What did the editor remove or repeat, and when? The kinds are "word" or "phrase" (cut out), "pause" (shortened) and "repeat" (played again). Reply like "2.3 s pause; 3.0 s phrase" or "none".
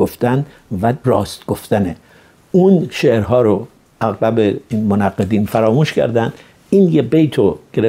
none

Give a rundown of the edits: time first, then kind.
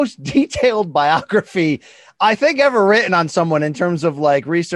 none

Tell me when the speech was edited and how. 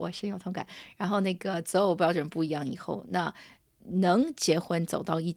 none

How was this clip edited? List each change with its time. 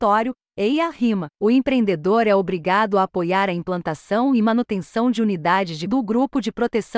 5.9 s word

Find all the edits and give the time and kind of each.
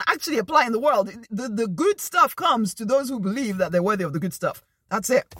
none

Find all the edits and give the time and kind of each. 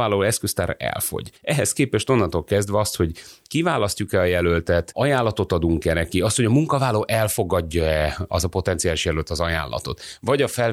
1.4 s pause

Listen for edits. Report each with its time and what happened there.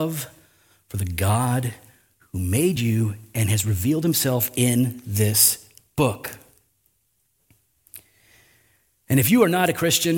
none

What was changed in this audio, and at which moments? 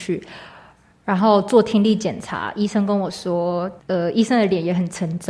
3.8 s pause

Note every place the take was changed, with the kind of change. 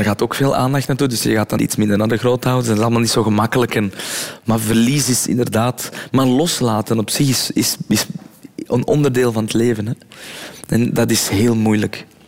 1.6 s word

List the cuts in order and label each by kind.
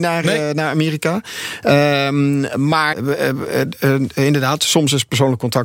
2.9 s word

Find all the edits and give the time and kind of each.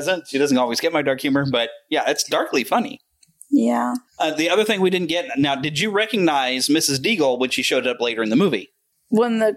4.1 s pause

